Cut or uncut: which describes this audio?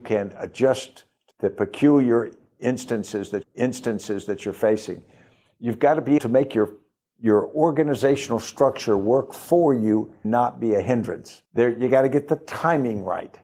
cut